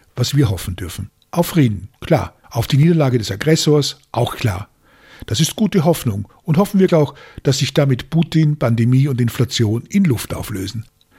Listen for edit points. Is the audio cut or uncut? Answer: cut